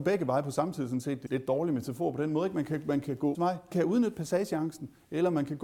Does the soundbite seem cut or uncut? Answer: cut